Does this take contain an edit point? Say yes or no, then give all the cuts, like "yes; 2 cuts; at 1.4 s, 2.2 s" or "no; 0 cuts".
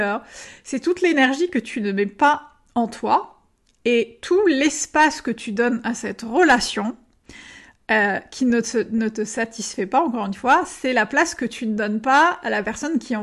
no; 0 cuts